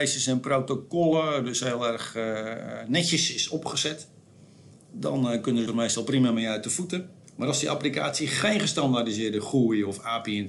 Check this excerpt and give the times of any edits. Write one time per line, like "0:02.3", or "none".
0:05.7
0:07.2

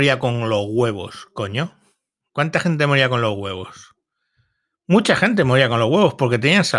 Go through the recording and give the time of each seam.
none

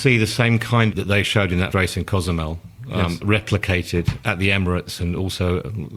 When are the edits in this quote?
0:00.9
0:01.7

